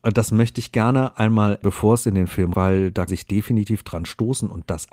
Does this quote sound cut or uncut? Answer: cut